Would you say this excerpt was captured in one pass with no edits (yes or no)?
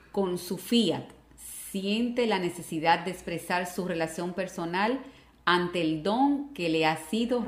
yes